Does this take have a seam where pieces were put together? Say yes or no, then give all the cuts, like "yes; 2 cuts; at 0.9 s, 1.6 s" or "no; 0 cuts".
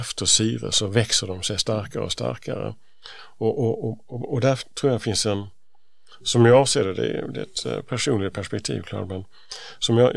no; 0 cuts